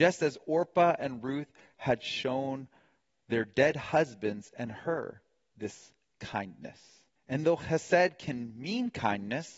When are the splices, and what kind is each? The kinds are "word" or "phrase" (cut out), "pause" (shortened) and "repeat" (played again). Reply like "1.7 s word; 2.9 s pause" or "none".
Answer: 7.2 s pause